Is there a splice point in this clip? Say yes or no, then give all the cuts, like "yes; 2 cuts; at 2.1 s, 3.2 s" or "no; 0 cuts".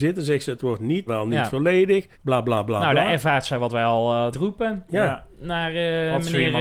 yes; 3 cuts; at 1.1 s, 2.1 s, 4.3 s